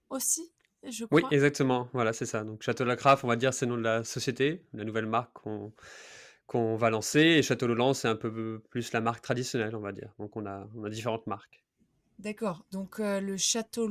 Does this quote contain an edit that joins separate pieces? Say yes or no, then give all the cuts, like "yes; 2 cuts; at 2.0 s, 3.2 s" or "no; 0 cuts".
no; 0 cuts